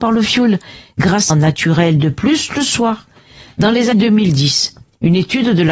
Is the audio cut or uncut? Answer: cut